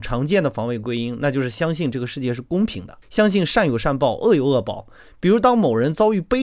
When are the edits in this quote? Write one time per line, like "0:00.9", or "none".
0:03.0